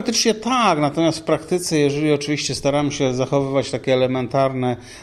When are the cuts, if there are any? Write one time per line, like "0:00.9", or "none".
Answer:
none